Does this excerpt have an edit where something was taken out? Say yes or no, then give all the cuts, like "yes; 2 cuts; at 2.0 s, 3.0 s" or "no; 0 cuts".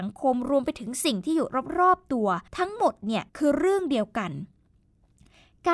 yes; 2 cuts; at 2.5 s, 3.3 s